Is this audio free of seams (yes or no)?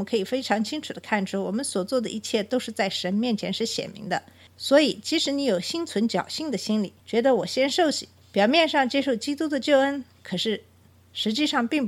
no